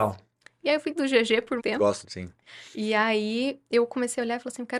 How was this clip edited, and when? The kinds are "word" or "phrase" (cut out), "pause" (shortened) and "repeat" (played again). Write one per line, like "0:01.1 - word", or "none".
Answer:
0:01.0 - word
0:01.6 - word
0:02.0 - word